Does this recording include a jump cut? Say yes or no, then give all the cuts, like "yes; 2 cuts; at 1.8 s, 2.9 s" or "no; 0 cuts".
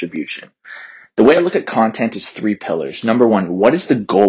no; 0 cuts